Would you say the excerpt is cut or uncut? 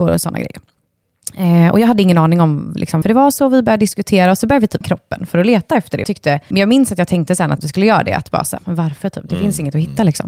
cut